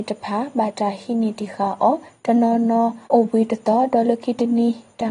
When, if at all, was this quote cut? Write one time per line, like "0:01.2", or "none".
0:03.0